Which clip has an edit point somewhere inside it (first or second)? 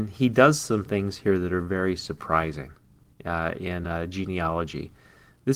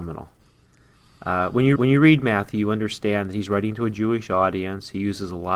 second